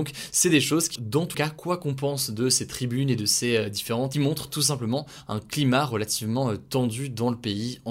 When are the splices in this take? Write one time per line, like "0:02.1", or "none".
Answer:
0:01.0
0:01.3
0:04.1